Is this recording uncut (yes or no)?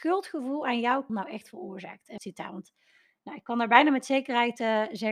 no